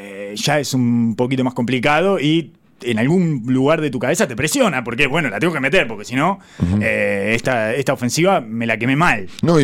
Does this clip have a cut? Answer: no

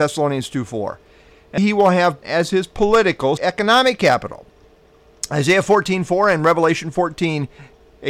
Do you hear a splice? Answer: yes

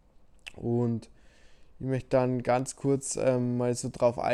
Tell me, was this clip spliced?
no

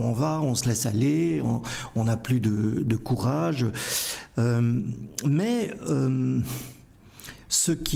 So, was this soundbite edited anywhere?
no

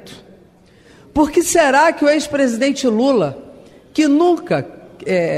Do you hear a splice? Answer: no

